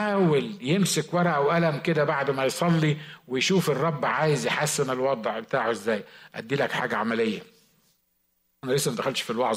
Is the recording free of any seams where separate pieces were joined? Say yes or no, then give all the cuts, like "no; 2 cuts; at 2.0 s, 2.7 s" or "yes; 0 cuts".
yes; 0 cuts